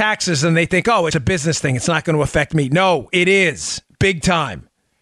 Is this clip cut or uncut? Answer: cut